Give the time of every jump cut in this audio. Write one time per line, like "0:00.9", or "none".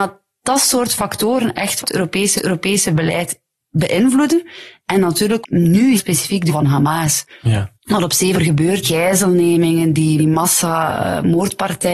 0:01.8
0:02.4
0:05.4
0:06.0
0:06.5
0:07.8
0:08.3
0:08.8
0:10.2